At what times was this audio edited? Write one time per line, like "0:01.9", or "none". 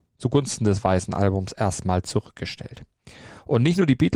none